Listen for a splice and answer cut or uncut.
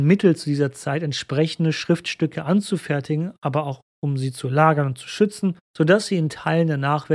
cut